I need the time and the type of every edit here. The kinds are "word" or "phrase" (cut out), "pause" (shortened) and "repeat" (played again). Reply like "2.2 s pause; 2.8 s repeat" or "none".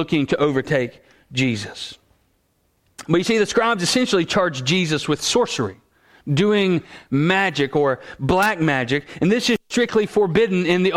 none